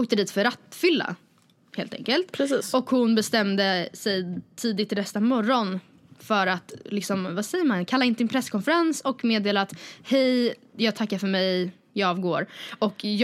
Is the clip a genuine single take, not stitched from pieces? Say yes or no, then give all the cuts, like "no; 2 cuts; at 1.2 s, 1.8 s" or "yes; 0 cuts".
yes; 0 cuts